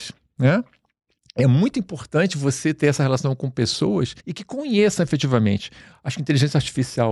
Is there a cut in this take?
yes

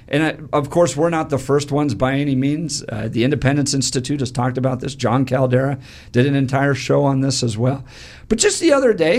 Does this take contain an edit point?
no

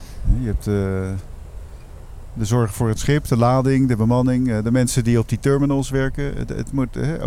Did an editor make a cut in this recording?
no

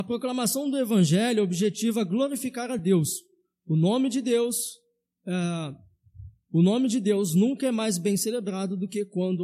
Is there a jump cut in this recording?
no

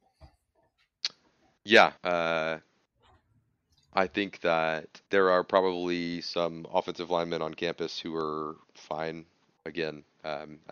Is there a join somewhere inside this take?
yes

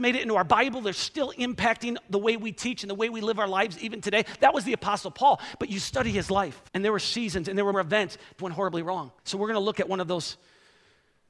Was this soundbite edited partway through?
yes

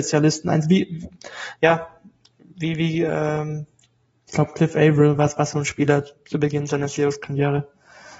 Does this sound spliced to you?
no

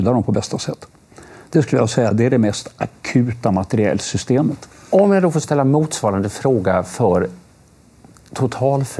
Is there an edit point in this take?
no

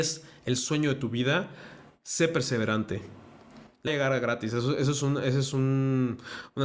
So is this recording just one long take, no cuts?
no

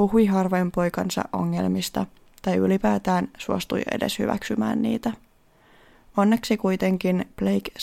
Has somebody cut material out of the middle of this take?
no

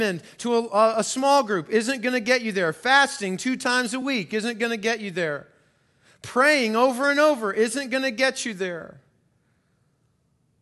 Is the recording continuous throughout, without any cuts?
yes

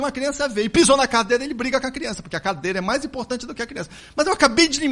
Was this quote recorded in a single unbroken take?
yes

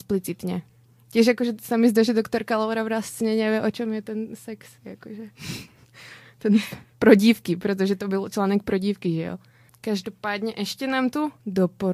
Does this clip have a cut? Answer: no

